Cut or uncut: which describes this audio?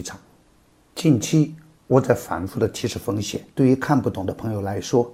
cut